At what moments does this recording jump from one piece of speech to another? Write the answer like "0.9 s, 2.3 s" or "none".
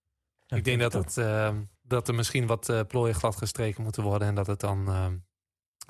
1.7 s